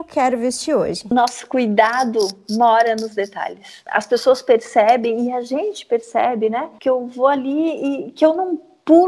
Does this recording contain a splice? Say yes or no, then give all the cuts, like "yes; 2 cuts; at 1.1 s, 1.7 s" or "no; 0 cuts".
no; 0 cuts